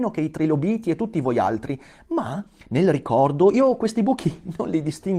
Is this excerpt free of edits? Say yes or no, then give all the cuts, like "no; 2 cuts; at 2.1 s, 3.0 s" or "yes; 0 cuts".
yes; 0 cuts